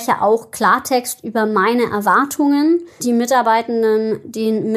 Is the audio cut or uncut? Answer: cut